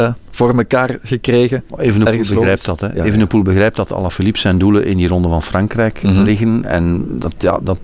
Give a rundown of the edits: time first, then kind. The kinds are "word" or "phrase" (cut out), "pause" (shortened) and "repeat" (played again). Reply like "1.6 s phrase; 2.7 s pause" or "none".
none

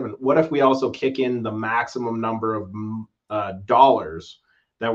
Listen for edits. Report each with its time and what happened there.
none

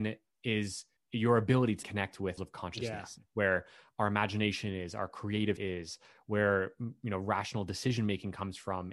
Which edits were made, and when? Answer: 1.0 s pause; 1.8 s word; 2.4 s phrase; 5.6 s word

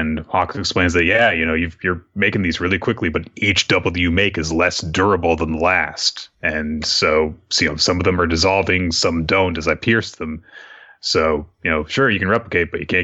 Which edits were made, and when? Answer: none

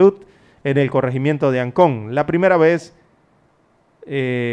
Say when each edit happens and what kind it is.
none

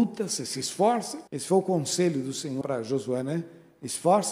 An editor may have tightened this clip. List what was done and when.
1.3 s pause; 2.6 s word

